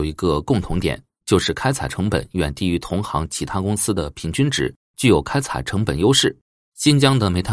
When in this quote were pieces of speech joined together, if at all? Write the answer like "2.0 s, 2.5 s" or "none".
6.5 s